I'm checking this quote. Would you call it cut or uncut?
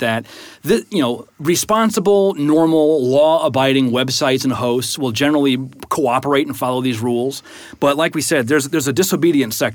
uncut